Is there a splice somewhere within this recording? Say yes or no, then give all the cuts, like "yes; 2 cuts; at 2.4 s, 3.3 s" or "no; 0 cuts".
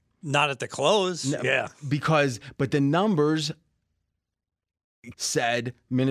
yes; 1 cut; at 5.1 s